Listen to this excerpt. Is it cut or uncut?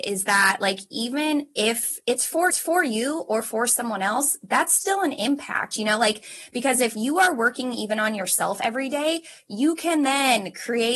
cut